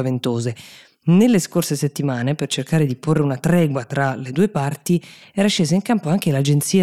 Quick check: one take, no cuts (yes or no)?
yes